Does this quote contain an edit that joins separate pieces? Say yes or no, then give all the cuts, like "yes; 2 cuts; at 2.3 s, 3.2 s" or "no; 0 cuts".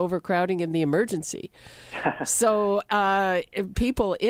no; 0 cuts